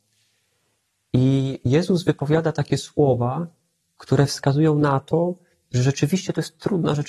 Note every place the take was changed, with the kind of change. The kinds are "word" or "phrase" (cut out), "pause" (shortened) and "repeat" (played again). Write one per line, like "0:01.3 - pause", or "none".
none